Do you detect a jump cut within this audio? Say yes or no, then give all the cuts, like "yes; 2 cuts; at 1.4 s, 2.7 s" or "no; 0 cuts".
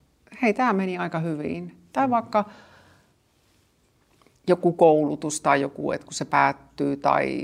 no; 0 cuts